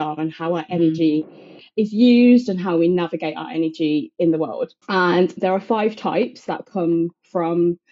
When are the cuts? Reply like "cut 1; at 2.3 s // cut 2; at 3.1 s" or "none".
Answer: cut 1; at 4.8 s